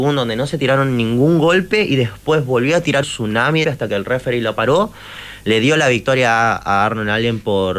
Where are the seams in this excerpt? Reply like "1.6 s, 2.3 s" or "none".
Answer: 3.0 s, 3.6 s